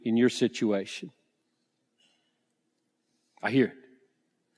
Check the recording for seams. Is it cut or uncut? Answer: uncut